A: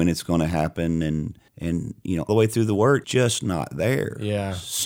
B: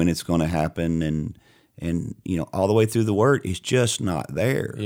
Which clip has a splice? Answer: A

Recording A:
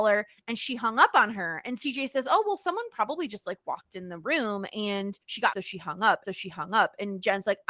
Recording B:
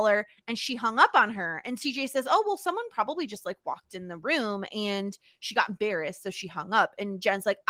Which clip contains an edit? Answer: A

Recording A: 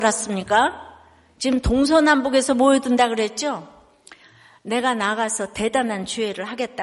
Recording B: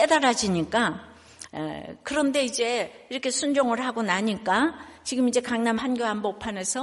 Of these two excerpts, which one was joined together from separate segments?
B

